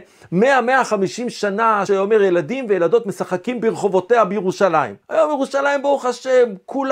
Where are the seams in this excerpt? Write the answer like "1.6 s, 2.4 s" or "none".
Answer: 1.9 s, 5.0 s